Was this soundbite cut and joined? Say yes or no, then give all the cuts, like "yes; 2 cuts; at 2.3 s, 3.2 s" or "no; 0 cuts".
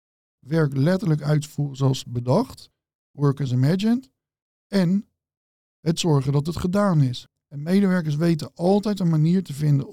no; 0 cuts